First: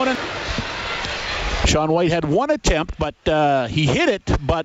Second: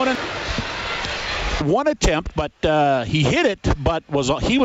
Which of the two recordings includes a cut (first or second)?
second